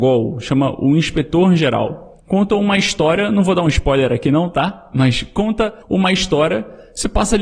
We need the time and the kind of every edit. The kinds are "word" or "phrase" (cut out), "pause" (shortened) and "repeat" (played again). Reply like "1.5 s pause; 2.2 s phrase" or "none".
2.2 s pause; 5.8 s pause